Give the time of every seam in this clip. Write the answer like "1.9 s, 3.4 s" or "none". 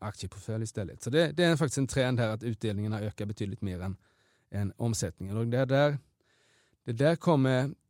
none